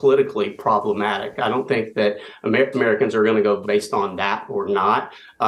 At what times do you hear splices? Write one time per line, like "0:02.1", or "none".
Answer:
0:02.7
0:03.6